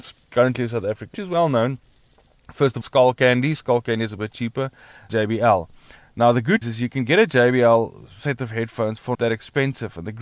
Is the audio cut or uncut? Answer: cut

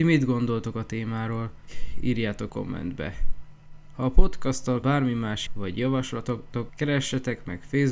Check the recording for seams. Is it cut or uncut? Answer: cut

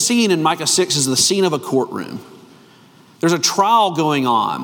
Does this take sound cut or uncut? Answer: uncut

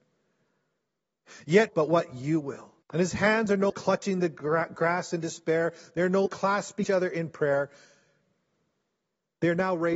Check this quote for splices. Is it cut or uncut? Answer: cut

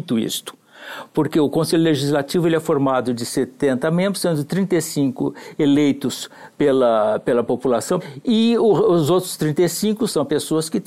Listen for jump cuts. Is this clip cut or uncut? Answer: uncut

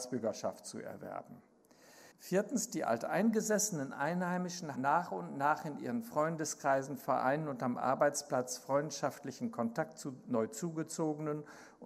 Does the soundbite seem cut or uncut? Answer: cut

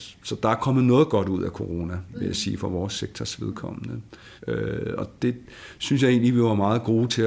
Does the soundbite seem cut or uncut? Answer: cut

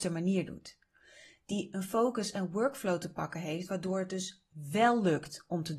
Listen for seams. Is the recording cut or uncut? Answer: uncut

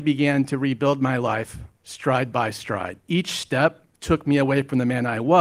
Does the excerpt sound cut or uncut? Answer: cut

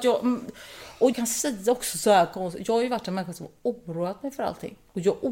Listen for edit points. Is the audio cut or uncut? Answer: cut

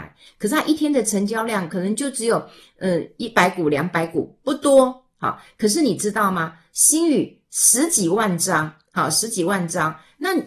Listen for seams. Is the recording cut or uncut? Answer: uncut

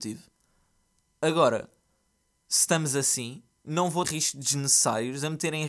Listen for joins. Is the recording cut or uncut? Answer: cut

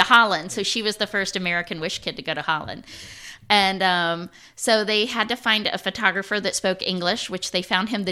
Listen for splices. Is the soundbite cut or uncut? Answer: uncut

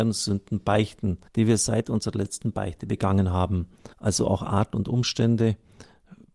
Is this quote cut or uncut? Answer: cut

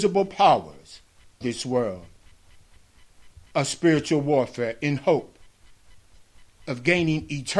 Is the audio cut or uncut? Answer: cut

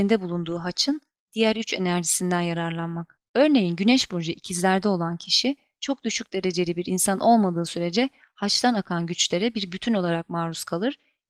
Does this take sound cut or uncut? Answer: uncut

